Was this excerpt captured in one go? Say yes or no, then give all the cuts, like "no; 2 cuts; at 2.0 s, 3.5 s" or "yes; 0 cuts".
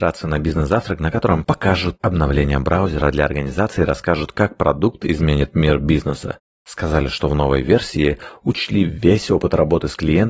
yes; 0 cuts